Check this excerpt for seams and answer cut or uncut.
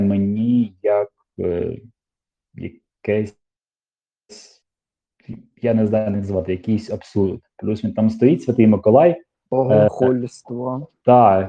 uncut